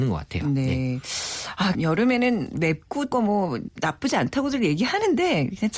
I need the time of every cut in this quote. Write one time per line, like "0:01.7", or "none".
0:01.7
0:03.1
0:03.7